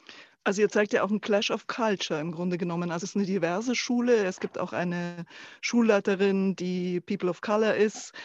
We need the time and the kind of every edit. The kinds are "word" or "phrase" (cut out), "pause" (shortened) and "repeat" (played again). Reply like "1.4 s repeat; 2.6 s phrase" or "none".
3.0 s word